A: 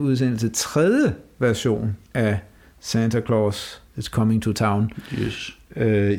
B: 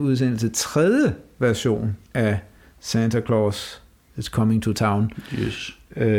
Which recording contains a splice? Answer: A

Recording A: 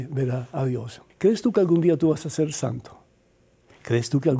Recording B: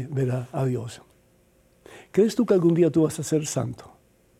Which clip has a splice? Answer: A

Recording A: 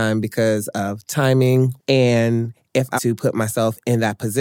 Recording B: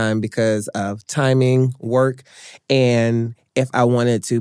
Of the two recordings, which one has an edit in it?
A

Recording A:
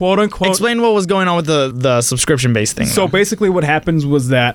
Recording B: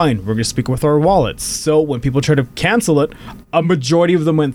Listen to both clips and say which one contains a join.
A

